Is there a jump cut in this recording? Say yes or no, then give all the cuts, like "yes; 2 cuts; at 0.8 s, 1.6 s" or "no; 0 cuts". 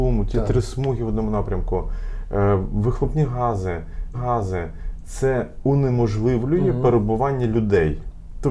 yes; 1 cut; at 4.1 s